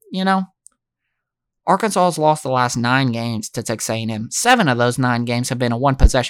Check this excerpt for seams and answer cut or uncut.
uncut